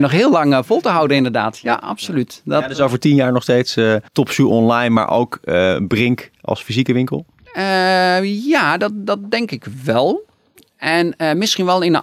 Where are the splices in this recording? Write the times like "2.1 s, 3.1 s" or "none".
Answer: 4.1 s